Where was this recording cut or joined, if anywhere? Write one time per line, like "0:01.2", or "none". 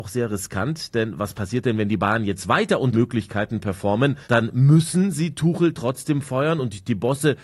0:02.9
0:04.2